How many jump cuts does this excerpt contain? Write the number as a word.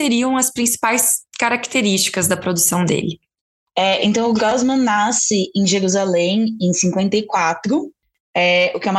zero